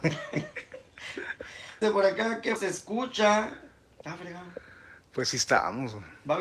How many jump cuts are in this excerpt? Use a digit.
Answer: 3